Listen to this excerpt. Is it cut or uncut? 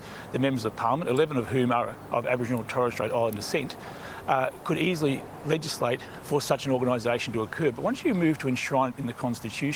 uncut